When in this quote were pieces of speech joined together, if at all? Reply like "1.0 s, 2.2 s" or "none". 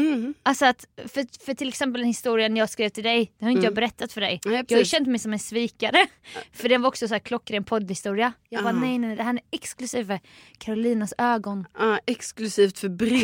none